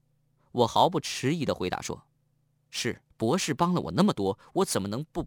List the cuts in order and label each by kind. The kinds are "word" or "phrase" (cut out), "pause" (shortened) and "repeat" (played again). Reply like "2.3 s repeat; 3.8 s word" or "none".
2.1 s pause; 3.1 s pause